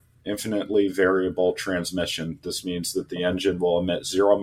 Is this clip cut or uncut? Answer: uncut